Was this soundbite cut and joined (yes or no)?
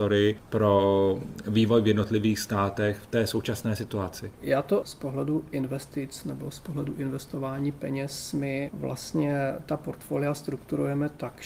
yes